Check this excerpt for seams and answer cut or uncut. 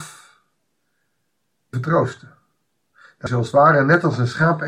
cut